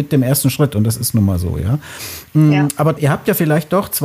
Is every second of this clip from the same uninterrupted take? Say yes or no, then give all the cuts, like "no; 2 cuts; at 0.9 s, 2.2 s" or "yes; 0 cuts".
no; 1 cut; at 3.0 s